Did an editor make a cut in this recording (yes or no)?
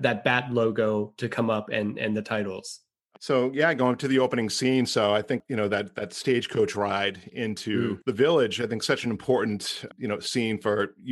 no